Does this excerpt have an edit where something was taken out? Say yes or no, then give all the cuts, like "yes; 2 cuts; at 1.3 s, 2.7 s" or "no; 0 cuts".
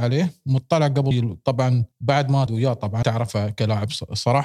yes; 4 cuts; at 1.1 s, 1.9 s, 2.5 s, 3.0 s